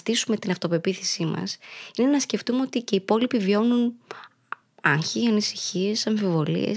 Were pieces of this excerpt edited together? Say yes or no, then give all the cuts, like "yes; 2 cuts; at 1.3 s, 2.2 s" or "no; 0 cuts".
no; 0 cuts